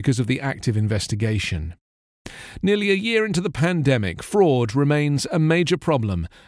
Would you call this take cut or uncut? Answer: uncut